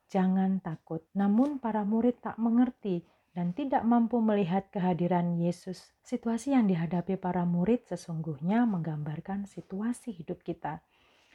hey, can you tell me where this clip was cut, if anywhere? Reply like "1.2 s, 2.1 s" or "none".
1.1 s, 6.0 s